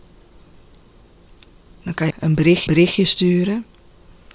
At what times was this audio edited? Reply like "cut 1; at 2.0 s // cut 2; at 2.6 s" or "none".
cut 1; at 2.1 s // cut 2; at 2.7 s